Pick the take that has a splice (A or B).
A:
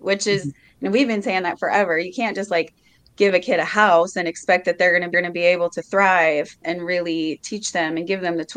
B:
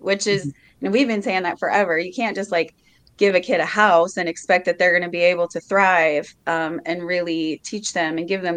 A